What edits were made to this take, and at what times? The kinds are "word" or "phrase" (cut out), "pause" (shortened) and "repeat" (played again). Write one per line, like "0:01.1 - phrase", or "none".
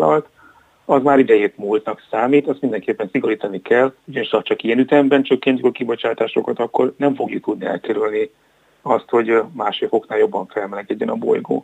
0:04.0 - pause